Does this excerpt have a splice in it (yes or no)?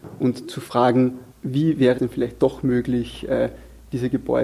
yes